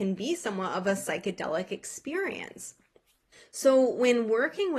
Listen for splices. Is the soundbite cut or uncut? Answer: cut